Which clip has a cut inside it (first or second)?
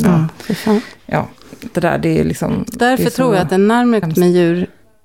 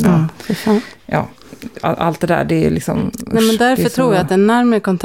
first